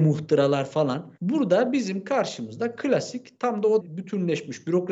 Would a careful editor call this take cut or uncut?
cut